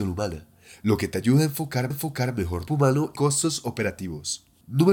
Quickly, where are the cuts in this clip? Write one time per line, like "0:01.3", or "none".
0:01.9
0:02.7
0:03.2